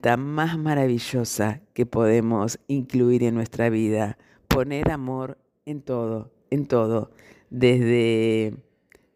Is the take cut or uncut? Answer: uncut